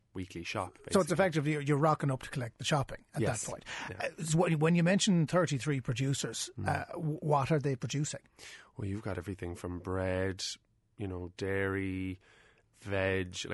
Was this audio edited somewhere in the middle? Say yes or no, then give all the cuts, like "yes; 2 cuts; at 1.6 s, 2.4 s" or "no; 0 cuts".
no; 0 cuts